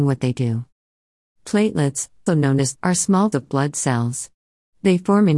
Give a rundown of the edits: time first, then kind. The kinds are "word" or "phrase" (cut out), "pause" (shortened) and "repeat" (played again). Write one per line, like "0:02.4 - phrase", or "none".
0:02.3 - word
0:02.8 - word
0:03.3 - word